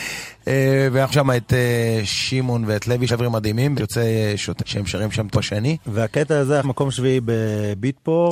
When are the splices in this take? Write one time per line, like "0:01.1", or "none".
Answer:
0:01.1
0:03.1
0:03.8
0:04.6
0:05.3
0:06.6